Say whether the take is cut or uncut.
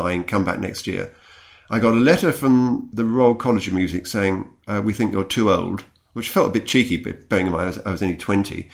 uncut